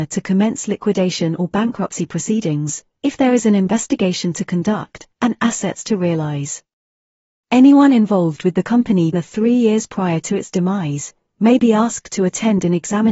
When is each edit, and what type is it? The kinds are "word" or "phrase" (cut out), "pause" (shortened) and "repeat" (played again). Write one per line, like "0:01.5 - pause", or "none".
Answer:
0:09.1 - word